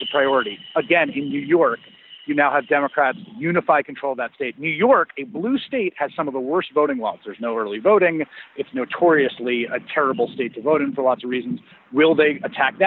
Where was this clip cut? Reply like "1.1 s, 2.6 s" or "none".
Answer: none